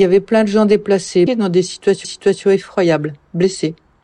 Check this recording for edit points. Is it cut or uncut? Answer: cut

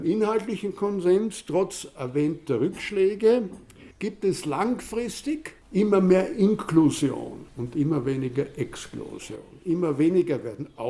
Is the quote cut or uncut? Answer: cut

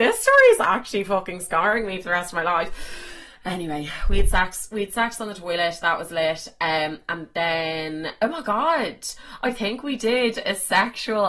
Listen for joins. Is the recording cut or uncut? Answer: uncut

